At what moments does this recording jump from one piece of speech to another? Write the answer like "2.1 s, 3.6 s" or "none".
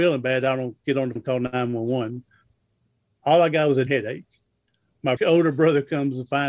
1.2 s, 3.9 s, 5.2 s